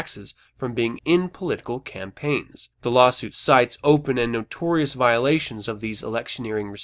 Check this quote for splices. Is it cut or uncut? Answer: cut